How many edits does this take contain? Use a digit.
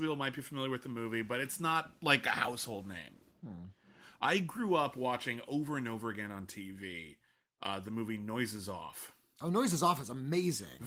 0